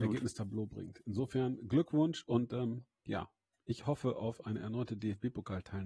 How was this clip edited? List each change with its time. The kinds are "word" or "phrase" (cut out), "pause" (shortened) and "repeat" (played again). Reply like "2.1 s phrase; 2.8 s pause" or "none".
none